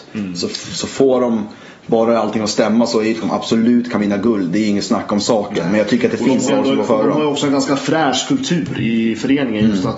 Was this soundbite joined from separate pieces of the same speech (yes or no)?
yes